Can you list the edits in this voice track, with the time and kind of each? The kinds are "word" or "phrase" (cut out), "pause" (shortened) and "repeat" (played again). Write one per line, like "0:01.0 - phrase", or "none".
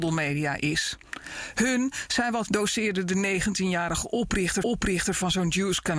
0:02.5 - phrase
0:04.6 - repeat